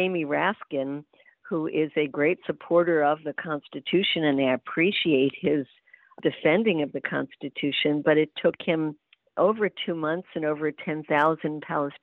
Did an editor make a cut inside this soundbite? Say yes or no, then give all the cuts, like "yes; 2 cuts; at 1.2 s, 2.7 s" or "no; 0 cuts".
no; 0 cuts